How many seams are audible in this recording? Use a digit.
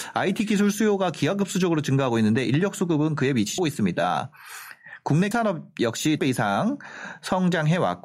3